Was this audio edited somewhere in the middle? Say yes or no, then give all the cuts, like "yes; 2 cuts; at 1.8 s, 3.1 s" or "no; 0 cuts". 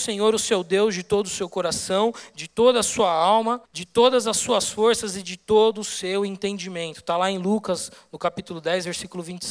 yes; 1 cut; at 3.7 s